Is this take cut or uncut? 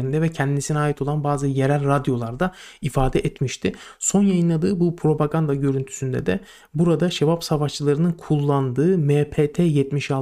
uncut